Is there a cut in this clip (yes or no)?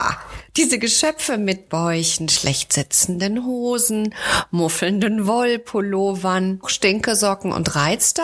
yes